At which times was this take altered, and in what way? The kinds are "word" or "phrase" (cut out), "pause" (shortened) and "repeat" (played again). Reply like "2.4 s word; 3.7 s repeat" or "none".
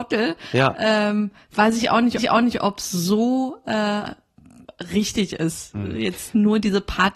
2.2 s repeat